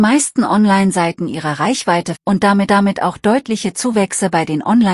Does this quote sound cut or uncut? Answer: cut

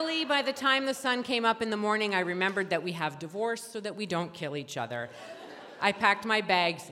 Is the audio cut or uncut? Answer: uncut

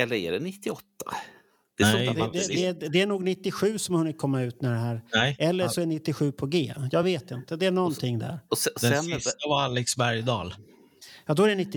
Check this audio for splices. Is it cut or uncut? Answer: uncut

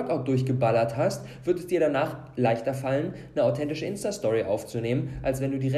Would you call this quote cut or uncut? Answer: uncut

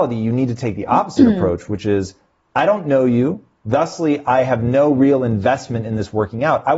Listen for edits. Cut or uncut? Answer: uncut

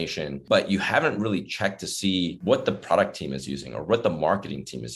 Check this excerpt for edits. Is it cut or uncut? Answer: uncut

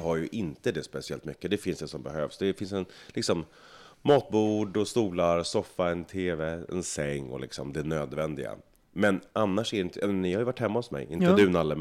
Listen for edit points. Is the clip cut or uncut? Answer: uncut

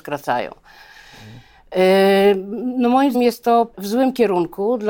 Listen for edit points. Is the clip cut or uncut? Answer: cut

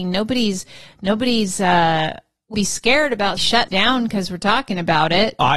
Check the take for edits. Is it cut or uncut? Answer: cut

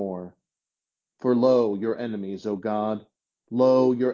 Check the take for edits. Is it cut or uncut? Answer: uncut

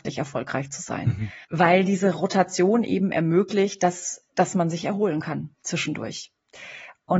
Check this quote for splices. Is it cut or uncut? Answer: cut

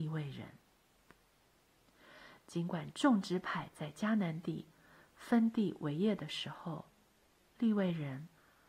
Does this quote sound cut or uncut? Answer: uncut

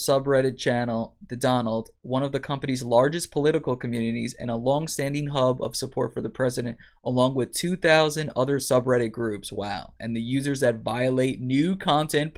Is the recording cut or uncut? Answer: uncut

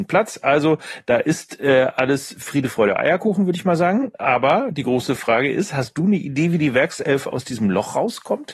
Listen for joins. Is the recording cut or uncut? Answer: uncut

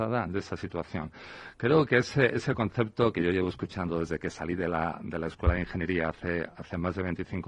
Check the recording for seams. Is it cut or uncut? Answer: uncut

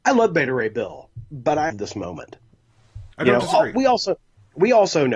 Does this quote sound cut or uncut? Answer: cut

